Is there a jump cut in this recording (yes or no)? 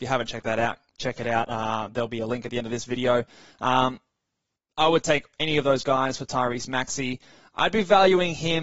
no